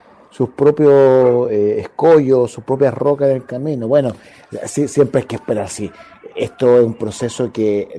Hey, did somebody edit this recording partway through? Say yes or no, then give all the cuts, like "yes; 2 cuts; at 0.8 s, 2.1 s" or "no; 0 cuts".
no; 0 cuts